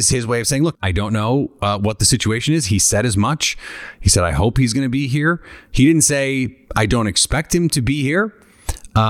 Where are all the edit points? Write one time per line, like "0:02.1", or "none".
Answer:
0:06.6